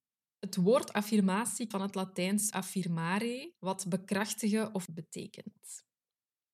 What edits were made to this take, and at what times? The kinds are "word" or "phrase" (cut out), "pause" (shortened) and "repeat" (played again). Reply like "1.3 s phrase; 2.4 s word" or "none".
1.7 s word; 2.5 s word; 3.6 s pause; 4.8 s word

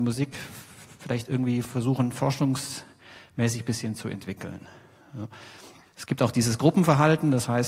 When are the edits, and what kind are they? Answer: none

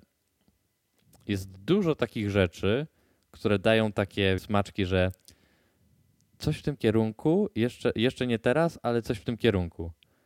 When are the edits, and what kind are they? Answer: 4.4 s phrase

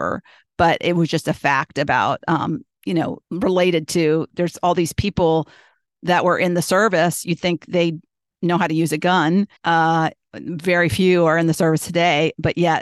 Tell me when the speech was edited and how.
3.2 s pause; 9.6 s pause

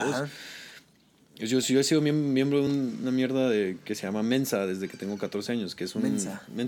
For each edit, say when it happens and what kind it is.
none

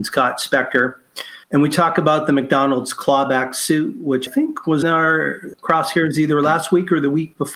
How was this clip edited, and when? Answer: 1.4 s pause; 4.3 s word; 4.8 s word; 5.5 s word

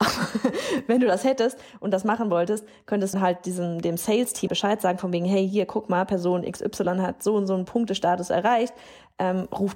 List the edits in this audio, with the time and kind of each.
3.1 s word; 4.5 s word

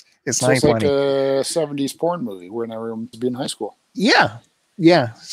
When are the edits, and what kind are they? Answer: 3.1 s word

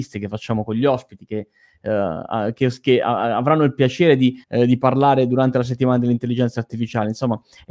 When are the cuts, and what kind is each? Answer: 4.4 s pause

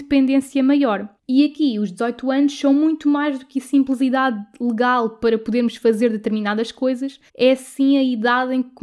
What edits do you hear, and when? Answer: 1.2 s pause; 7.3 s pause

